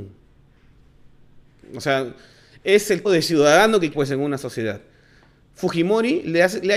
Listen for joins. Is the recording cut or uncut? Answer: cut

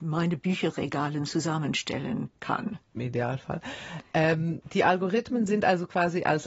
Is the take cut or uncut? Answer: cut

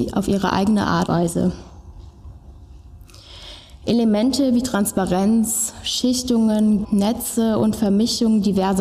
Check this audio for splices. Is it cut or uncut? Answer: cut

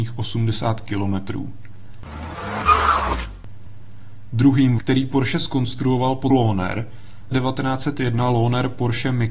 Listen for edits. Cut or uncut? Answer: cut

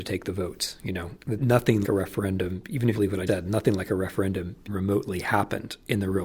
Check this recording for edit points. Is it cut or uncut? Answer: cut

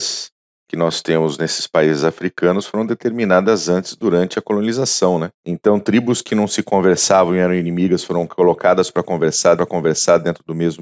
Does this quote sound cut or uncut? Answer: cut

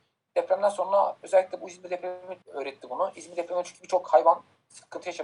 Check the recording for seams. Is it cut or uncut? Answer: cut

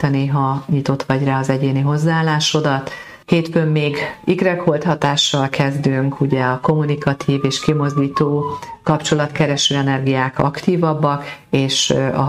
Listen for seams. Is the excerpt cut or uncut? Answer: cut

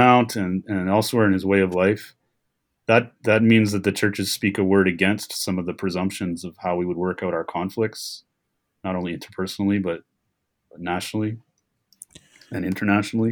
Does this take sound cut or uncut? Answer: uncut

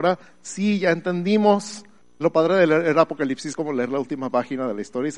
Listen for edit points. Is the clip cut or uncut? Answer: cut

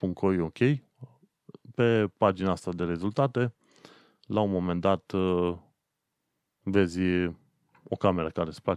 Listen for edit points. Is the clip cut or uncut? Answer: uncut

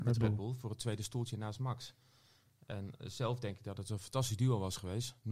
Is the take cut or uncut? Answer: uncut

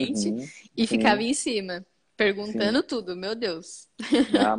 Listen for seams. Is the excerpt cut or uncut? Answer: uncut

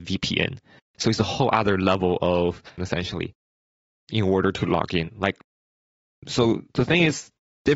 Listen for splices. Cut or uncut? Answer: cut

